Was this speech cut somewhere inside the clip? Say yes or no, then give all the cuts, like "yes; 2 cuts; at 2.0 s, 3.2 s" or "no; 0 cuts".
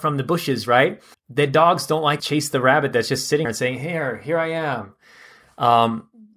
yes; 3 cuts; at 1.1 s, 2.2 s, 3.4 s